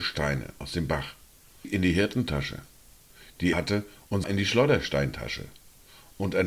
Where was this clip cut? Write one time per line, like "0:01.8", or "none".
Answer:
0:01.6
0:03.5
0:04.2